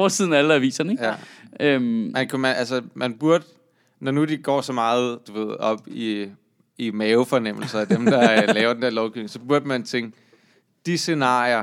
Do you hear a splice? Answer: no; 0 cuts

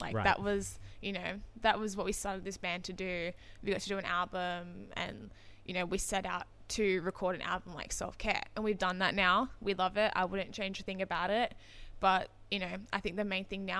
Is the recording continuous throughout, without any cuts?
yes; 0 cuts

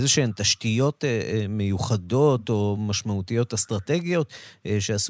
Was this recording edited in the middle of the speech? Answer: no; 0 cuts

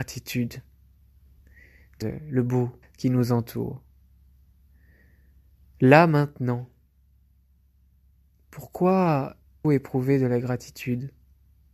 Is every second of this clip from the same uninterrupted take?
no; 3 cuts; at 2.0 s, 2.8 s, 9.6 s

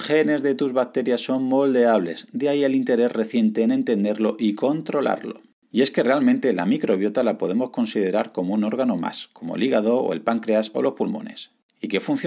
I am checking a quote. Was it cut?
no; 0 cuts

